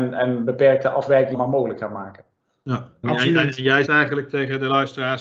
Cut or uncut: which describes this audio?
cut